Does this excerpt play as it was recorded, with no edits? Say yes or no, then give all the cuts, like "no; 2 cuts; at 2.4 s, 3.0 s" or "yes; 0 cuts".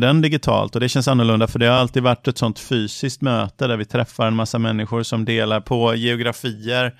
yes; 0 cuts